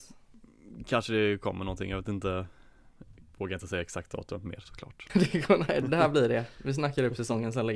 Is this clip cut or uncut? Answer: cut